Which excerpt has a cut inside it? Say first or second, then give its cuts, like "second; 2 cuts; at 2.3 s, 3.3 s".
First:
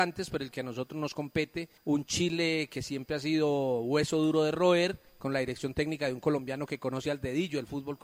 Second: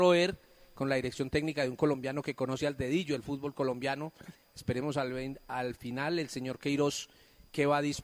first; 2 cuts; at 1.8 s, 5.1 s